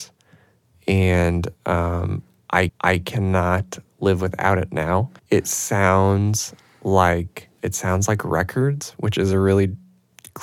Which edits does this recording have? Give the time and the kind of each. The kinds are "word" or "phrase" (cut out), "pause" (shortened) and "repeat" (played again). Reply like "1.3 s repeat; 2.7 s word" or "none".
2.7 s repeat; 5.2 s pause; 7.6 s word